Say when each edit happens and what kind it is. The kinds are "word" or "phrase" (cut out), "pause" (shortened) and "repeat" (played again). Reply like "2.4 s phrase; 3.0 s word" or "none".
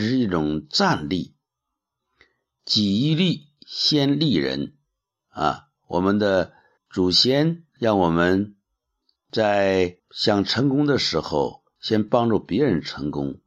6.8 s pause; 7.7 s pause; 10.0 s pause